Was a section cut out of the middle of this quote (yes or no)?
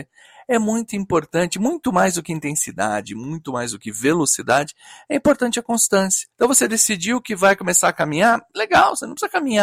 yes